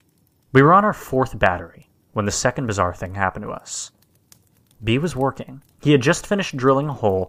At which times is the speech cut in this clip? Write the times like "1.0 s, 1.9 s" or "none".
5.7 s